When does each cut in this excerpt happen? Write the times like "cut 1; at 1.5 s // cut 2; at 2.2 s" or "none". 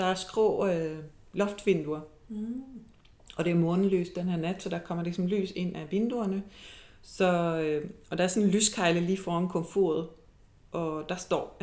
none